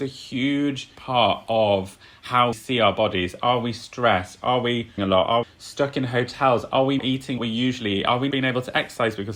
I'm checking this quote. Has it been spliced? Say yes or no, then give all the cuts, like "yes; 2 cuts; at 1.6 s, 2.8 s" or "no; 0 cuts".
yes; 7 cuts; at 0.9 s, 2.5 s, 5.0 s, 5.4 s, 7.0 s, 7.4 s, 8.3 s